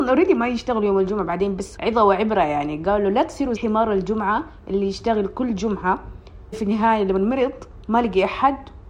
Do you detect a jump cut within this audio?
yes; 3 cuts; at 1.8 s, 3.6 s, 6.5 s

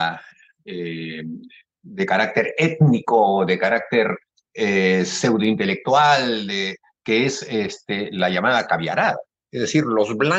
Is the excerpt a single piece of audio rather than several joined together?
yes; 0 cuts

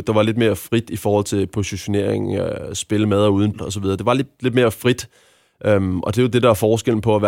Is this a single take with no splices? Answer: no; 1 cut; at 3.5 s

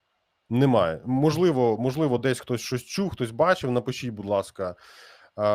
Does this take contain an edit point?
no; 0 cuts

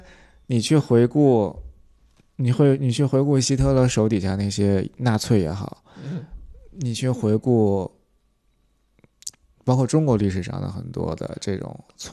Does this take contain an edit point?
no; 0 cuts

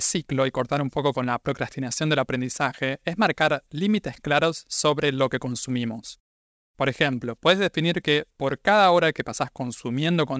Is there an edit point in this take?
no; 0 cuts

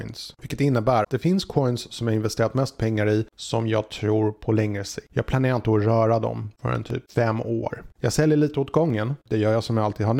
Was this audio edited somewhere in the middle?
yes; 1 cut; at 1.0 s

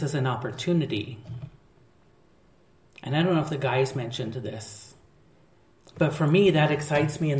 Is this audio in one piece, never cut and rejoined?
yes; 0 cuts

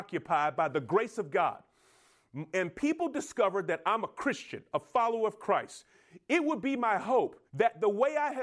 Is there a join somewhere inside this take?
yes; 1 cut; at 7.5 s

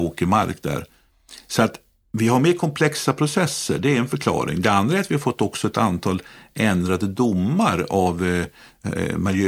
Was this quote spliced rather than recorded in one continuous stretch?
no; 0 cuts

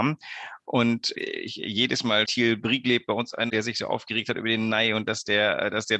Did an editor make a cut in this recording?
yes; 3 cuts; at 1.1 s, 2.2 s, 3.5 s

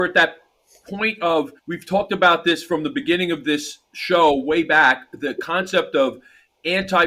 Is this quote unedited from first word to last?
no; 1 cut; at 1.6 s

